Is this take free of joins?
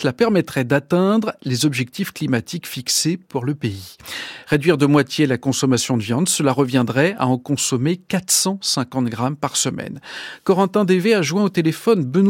yes; 0 cuts

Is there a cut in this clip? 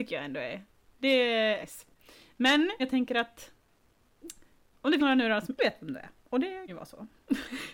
yes; 5 cuts; at 1.6 s, 2.8 s, 5.0 s, 5.6 s, 6.7 s

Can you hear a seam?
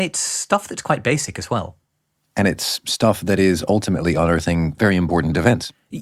no; 0 cuts

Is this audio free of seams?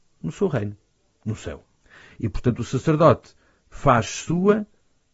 yes; 0 cuts

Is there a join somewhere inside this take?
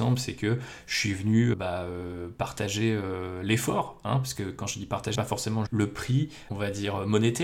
yes; 3 cuts; at 1.5 s, 5.2 s, 5.7 s

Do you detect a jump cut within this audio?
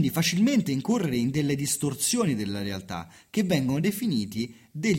no; 0 cuts

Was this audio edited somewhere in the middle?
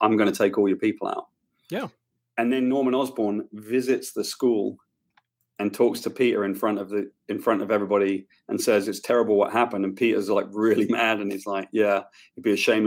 no; 0 cuts

